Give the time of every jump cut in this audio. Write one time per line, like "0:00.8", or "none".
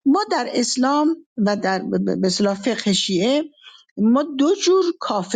none